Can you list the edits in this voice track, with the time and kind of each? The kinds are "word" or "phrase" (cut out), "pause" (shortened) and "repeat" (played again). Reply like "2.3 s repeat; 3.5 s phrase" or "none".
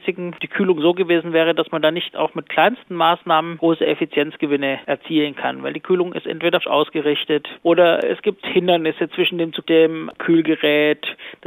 6.6 s word; 9.6 s phrase